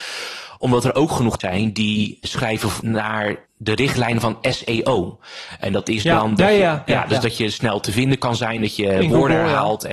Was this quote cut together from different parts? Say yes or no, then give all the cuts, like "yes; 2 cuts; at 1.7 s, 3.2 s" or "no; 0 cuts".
yes; 4 cuts; at 1.4 s, 2.2 s, 2.8 s, 3.5 s